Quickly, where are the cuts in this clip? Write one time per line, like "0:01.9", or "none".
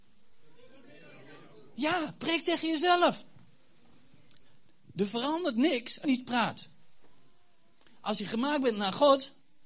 0:06.0